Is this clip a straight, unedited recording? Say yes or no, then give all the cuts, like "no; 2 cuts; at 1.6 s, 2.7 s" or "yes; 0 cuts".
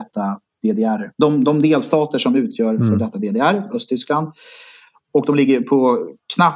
no; 1 cut; at 1.1 s